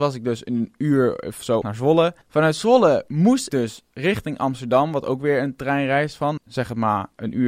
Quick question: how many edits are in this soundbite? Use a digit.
4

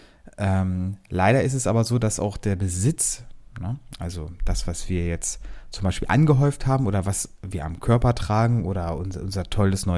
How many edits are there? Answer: 0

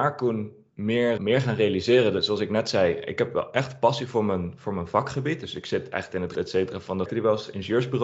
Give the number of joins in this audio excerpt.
3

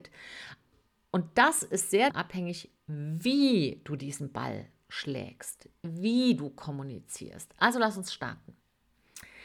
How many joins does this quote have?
1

